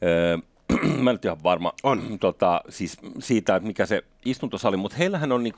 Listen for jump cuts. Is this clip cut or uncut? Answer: uncut